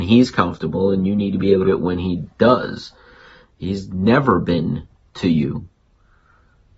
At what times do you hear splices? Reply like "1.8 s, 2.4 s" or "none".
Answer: 1.6 s, 2.3 s, 5.1 s